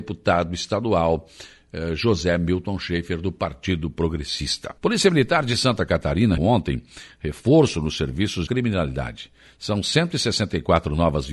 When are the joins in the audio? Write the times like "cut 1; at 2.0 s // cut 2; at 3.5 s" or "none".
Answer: cut 1; at 4.8 s // cut 2; at 6.4 s // cut 3; at 8.5 s